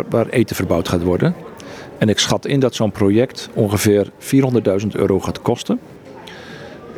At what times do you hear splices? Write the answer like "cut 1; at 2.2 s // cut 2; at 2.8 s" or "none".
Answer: none